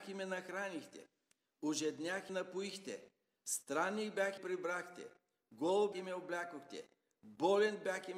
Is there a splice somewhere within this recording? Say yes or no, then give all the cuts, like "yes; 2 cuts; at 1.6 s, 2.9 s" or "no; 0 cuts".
yes; 3 cuts; at 2.3 s, 4.4 s, 5.9 s